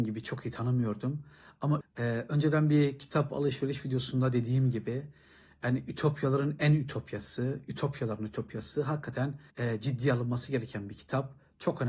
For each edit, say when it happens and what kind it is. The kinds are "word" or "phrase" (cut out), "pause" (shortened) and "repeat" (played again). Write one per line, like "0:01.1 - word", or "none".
0:01.8 - word
0:09.5 - pause